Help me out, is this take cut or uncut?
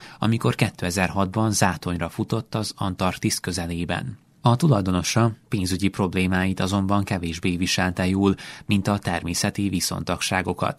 uncut